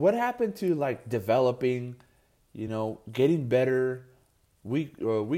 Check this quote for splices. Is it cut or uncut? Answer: uncut